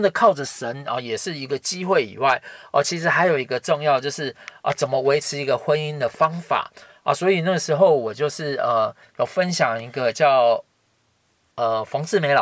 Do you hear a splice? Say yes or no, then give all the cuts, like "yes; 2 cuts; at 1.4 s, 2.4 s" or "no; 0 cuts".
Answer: no; 0 cuts